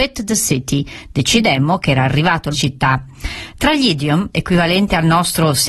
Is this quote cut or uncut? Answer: cut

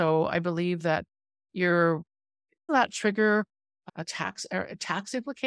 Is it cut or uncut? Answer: cut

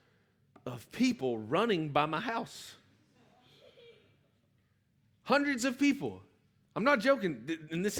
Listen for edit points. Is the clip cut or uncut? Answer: uncut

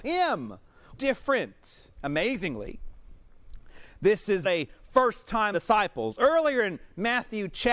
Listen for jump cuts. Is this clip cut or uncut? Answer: cut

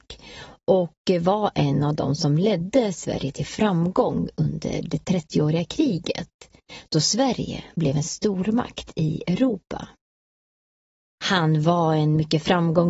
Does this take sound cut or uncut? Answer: uncut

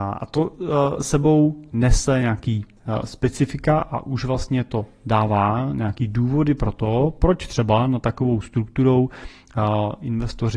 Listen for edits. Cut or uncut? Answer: uncut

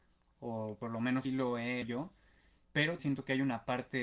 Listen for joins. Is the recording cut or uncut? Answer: cut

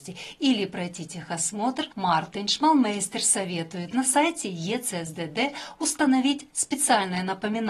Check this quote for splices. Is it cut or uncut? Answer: cut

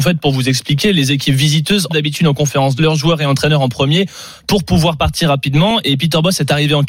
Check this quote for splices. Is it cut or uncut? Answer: cut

